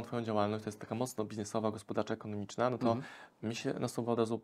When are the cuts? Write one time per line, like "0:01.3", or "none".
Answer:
none